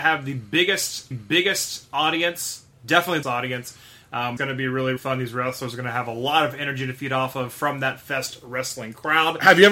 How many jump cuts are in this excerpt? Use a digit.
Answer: 4